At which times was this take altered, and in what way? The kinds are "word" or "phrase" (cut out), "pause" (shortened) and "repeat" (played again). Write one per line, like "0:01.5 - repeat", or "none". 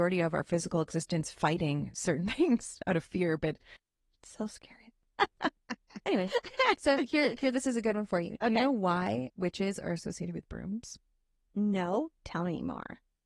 none